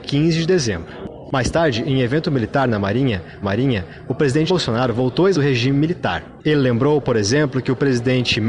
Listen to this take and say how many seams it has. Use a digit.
3